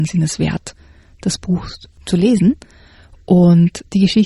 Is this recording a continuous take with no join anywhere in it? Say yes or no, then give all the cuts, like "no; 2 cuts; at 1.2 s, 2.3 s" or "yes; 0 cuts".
yes; 0 cuts